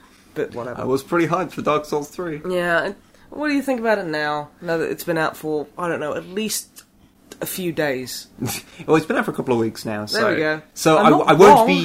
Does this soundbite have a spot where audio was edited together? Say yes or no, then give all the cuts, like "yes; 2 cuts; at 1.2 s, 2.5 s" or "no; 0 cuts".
no; 0 cuts